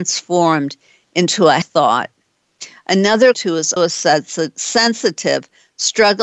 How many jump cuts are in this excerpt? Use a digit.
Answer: 3